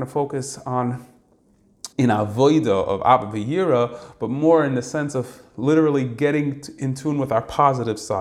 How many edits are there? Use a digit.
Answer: 1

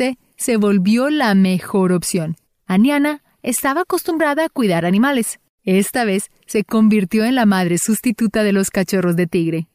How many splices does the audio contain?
2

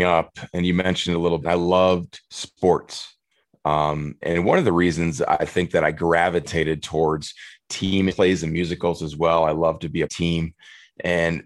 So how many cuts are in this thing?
5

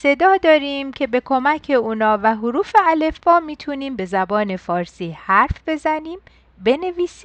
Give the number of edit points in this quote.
0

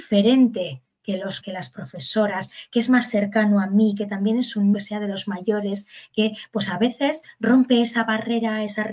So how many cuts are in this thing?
2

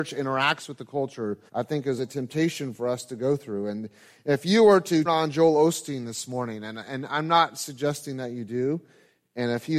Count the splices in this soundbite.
3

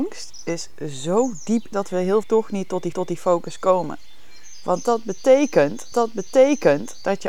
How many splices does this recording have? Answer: 4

